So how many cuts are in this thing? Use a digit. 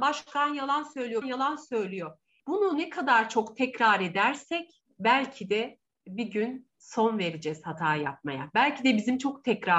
1